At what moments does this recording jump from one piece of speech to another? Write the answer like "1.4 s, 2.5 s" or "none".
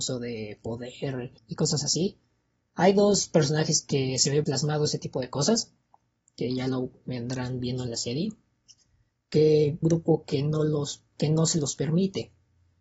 1.4 s, 4.4 s, 9.8 s